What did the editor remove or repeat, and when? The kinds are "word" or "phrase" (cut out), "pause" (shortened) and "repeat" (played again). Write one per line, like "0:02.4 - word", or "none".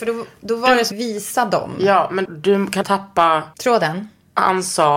0:00.9 - phrase
0:02.3 - word
0:02.8 - word
0:03.5 - pause